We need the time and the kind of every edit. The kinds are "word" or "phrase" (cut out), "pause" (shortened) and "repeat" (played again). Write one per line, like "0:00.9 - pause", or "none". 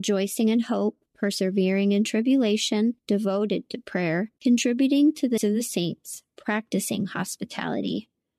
0:01.1 - pause
0:03.0 - pause
0:04.4 - pause
0:05.4 - word